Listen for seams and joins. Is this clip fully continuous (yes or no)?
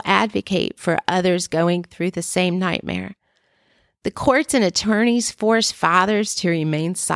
yes